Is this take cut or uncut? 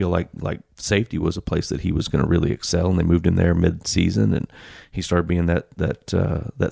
uncut